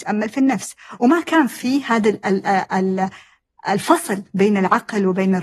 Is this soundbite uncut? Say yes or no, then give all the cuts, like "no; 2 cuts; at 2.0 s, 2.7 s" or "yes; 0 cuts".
yes; 0 cuts